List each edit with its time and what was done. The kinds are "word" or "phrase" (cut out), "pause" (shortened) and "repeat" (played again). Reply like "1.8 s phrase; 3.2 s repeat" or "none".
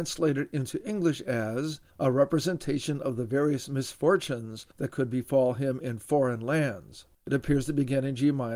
1.9 s pause; 7.1 s pause